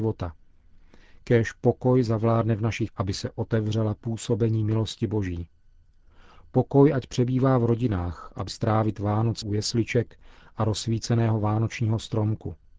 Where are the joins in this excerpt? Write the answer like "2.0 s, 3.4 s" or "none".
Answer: 2.9 s, 8.5 s, 9.4 s

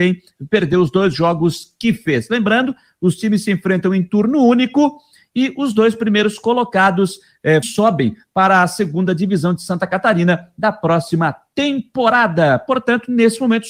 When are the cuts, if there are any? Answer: 7.6 s

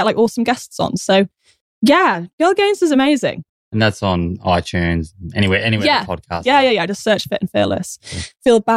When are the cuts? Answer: none

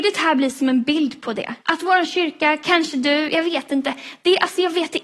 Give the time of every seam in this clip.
1.6 s

